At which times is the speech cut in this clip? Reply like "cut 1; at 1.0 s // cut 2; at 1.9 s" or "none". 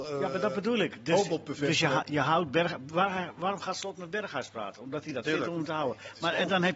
cut 1; at 5.2 s